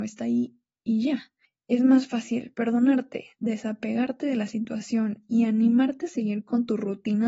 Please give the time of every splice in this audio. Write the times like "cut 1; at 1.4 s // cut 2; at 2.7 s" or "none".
cut 1; at 1.4 s